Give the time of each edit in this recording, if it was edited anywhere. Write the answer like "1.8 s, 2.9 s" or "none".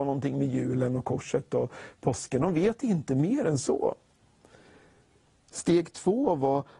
none